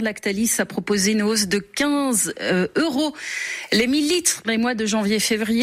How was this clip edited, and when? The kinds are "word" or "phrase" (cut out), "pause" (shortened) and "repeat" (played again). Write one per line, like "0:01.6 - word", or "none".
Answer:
0:04.4 - word